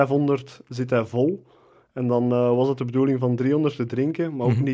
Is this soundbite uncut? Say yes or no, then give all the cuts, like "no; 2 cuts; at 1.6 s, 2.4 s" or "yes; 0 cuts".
yes; 0 cuts